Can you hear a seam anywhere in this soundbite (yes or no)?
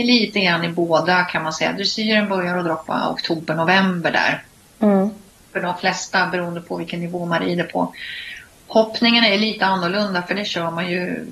no